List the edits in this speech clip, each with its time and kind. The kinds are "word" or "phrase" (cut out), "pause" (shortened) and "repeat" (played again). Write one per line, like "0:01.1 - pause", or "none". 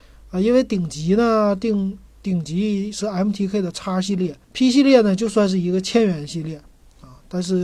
0:04.4 - pause